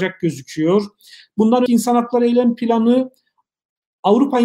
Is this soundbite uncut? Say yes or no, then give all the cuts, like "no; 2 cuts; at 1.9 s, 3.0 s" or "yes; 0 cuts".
no; 1 cut; at 1.7 s